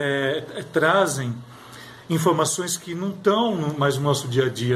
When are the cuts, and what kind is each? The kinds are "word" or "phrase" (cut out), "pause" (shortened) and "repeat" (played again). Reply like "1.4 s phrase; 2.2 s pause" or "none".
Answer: none